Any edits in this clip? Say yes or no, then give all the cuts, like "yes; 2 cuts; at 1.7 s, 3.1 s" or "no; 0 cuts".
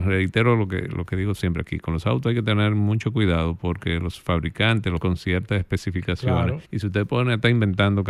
yes; 2 cuts; at 5.0 s, 6.6 s